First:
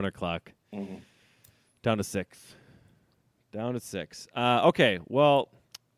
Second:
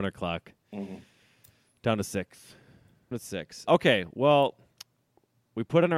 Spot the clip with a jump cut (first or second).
second